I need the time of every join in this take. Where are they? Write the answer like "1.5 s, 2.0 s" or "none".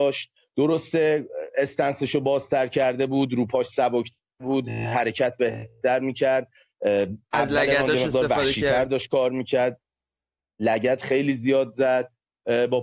none

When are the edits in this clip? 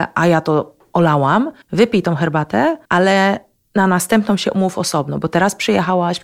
1.6 s, 2.8 s

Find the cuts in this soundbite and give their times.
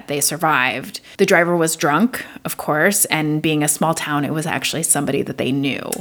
none

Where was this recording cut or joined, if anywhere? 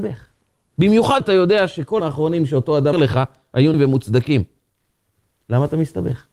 1.2 s, 2.0 s, 2.9 s, 3.7 s

